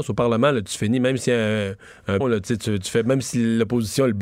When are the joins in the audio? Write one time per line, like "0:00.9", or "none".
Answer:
0:02.2